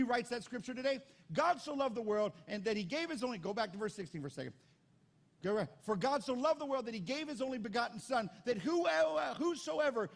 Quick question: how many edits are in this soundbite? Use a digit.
0